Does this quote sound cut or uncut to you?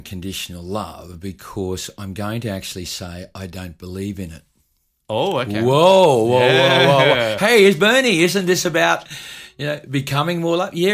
uncut